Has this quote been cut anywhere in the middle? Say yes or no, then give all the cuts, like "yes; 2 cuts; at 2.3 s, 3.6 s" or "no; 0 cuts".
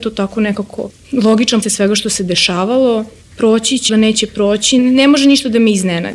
yes; 2 cuts; at 1.6 s, 3.9 s